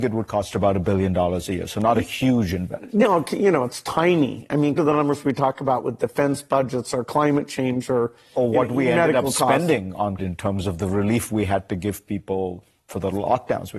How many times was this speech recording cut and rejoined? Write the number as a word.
two